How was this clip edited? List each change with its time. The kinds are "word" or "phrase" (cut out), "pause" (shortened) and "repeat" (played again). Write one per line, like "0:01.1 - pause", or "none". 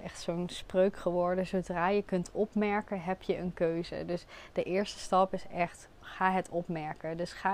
0:05.9 - pause